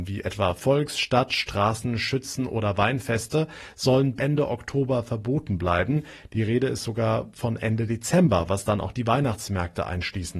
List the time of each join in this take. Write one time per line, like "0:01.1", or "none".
0:04.2